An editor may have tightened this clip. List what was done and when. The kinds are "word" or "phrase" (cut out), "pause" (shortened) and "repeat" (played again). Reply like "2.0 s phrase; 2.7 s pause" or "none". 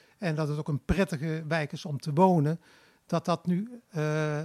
none